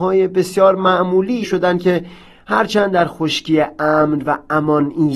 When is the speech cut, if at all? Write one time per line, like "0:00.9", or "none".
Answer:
0:01.4

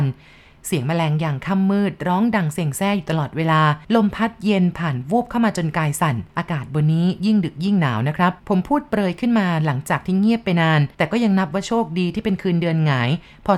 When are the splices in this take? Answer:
0:03.8
0:06.3
0:08.4
0:10.9

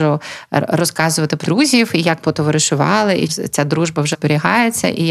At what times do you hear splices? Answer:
0:01.4
0:02.2
0:03.3
0:04.1

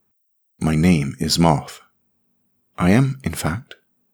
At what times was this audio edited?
none

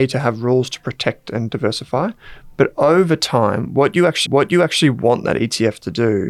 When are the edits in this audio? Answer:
0:04.3

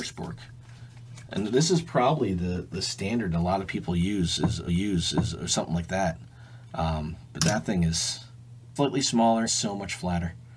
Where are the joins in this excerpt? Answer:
0:04.7
0:08.8
0:09.5

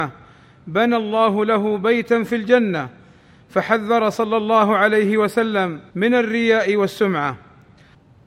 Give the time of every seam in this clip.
0:05.9

